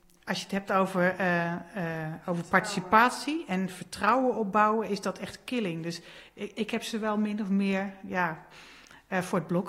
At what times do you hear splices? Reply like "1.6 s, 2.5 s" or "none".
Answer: none

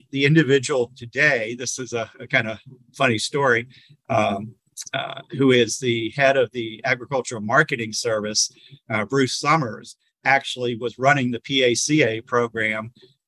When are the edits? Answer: none

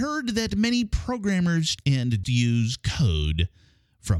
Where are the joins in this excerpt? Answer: 1.8 s, 2.2 s

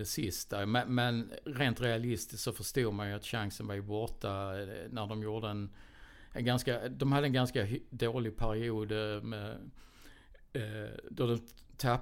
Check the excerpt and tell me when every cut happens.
none

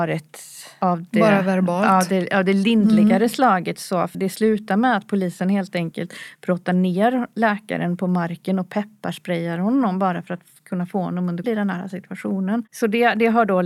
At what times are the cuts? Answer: 4.1 s, 11.4 s

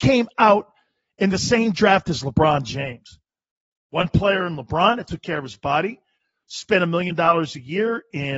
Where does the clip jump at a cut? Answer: none

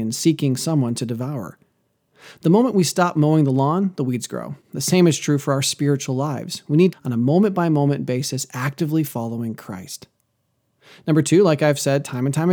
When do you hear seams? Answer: 4.6 s, 6.9 s

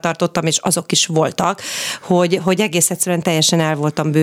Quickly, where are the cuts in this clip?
none

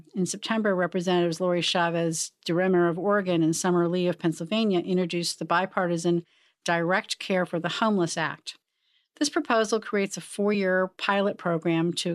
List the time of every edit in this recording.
none

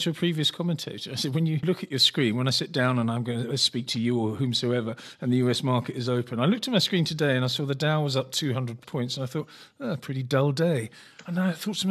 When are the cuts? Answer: 8.8 s

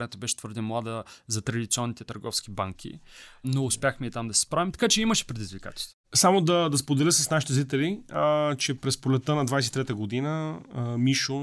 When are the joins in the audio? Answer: 6.0 s

